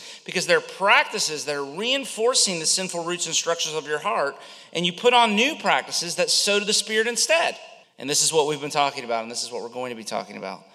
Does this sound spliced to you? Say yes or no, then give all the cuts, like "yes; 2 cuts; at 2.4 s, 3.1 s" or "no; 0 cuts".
yes; 1 cut; at 7.8 s